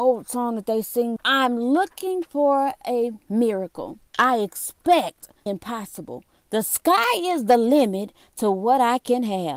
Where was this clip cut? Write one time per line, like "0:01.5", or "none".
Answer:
0:01.2
0:04.1
0:05.5